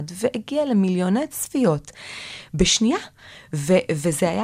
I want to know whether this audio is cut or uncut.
uncut